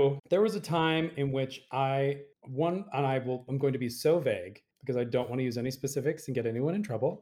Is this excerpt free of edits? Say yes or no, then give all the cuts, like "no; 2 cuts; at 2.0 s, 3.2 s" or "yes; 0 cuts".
no; 2 cuts; at 2.3 s, 4.7 s